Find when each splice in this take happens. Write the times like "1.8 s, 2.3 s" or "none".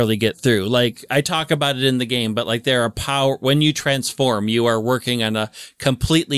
none

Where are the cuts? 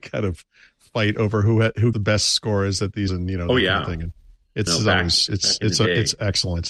1.9 s, 3.1 s, 4.7 s

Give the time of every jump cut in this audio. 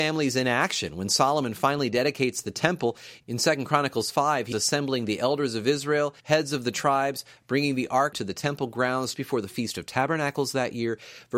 4.5 s, 6.2 s, 8.1 s, 9.1 s

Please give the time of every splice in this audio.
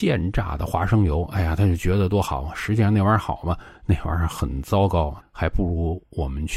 3.8 s, 5.2 s

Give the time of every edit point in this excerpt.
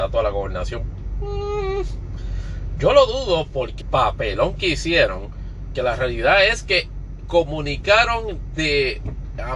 3.8 s, 5.7 s

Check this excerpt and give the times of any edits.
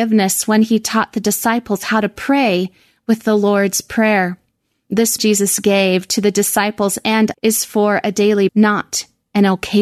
5.2 s, 7.3 s, 8.5 s

